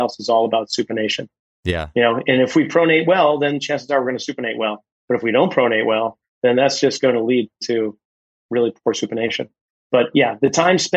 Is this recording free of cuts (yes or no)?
yes